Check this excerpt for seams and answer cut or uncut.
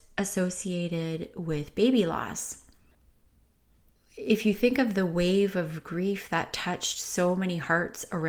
uncut